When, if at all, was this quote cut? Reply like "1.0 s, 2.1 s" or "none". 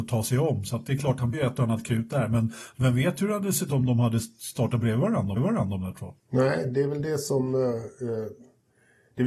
1.3 s, 3.7 s, 5.4 s, 6.2 s